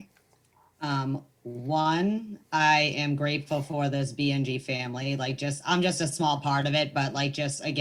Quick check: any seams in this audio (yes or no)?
no